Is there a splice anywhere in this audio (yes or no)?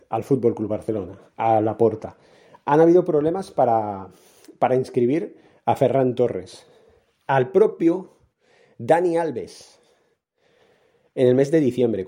no